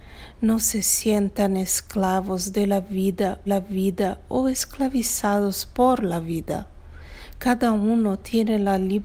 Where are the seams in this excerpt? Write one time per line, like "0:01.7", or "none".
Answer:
0:03.5